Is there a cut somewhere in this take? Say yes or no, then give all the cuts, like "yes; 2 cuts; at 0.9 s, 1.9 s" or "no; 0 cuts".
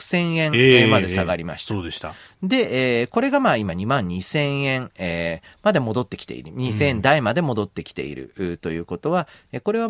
no; 0 cuts